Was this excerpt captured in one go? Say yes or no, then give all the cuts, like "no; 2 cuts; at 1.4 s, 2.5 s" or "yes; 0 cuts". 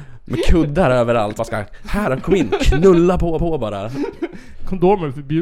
no; 2 cuts; at 1.4 s, 3.4 s